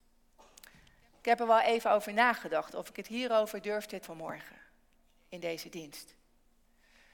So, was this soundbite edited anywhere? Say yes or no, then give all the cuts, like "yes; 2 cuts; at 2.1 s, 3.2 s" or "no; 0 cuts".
yes; 1 cut; at 4.0 s